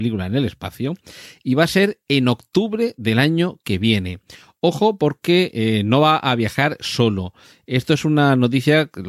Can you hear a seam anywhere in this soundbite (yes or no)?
no